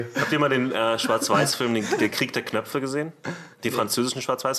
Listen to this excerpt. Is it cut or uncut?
uncut